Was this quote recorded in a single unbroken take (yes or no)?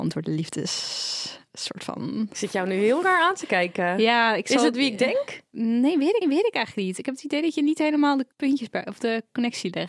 no